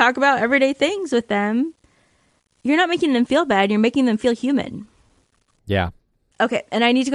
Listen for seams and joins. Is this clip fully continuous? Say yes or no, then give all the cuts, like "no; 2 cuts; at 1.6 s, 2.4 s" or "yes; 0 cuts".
yes; 0 cuts